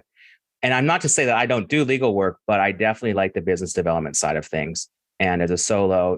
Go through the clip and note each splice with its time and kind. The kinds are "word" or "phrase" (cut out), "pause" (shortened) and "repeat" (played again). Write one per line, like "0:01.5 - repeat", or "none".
none